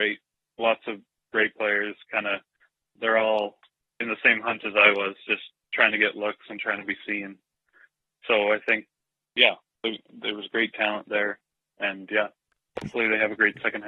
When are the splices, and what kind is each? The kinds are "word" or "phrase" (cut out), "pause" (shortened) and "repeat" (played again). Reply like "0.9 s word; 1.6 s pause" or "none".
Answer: none